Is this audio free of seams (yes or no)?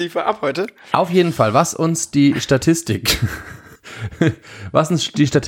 no